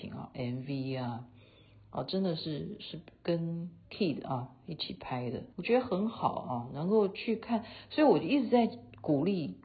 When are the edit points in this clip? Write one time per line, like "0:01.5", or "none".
0:05.5